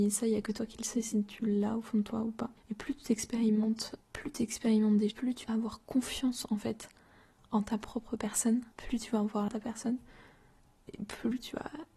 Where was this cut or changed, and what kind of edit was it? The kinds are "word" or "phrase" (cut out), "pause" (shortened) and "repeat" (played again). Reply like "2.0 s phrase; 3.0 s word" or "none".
2.6 s pause; 4.0 s word; 5.1 s word; 5.4 s word; 8.7 s pause; 9.5 s phrase